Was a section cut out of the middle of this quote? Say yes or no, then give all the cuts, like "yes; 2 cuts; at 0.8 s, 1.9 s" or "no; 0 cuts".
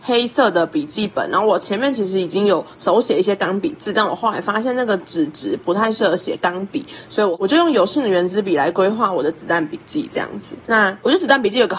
yes; 2 cuts; at 2.7 s, 10.6 s